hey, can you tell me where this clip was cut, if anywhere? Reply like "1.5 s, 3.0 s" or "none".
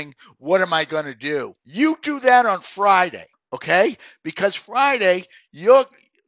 1.6 s, 3.3 s